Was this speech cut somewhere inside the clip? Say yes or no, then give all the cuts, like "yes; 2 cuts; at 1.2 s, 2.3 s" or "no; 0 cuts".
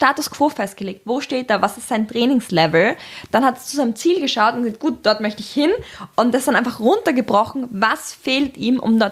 no; 0 cuts